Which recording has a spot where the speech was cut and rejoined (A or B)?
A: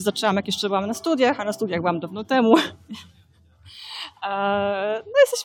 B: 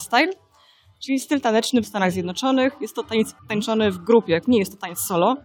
B